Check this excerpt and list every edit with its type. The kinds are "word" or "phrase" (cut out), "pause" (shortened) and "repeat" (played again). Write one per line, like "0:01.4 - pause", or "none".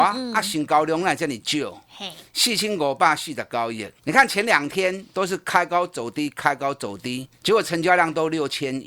0:04.0 - pause
0:07.3 - pause